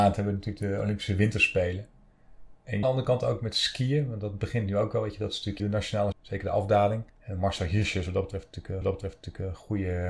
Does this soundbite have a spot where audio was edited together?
yes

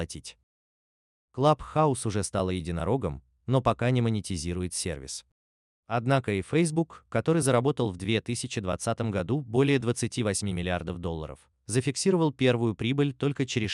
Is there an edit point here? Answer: no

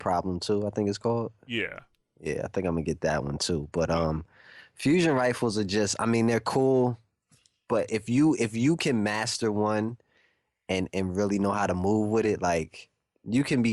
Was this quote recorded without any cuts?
yes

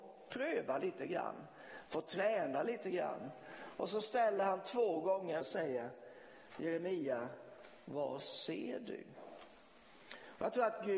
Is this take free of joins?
no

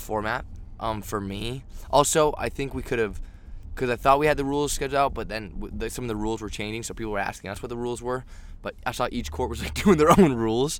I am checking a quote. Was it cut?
no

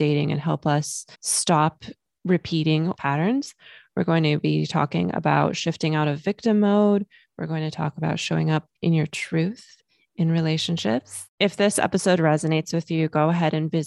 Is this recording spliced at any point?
yes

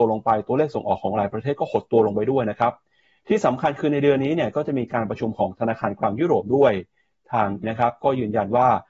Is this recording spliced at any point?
yes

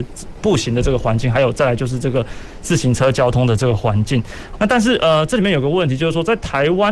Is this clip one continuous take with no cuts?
no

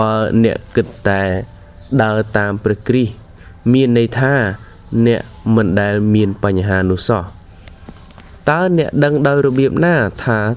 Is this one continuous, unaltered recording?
yes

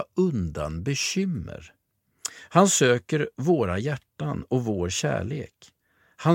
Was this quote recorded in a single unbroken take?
yes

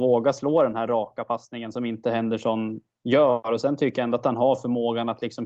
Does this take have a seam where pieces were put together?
no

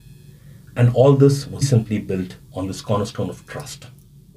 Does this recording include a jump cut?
yes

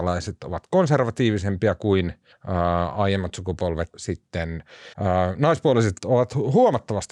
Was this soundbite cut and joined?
yes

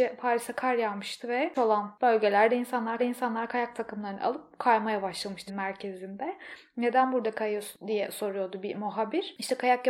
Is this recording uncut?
no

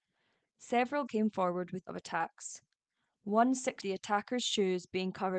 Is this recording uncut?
no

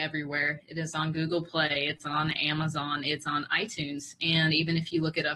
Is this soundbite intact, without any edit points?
yes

